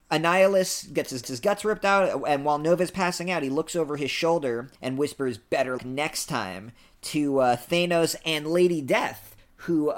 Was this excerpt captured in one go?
no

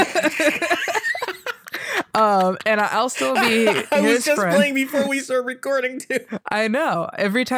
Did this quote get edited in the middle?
no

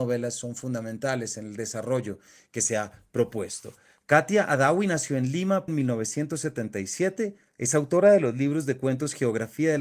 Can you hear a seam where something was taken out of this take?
yes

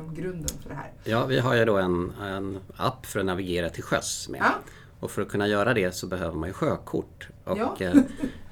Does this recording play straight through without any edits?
yes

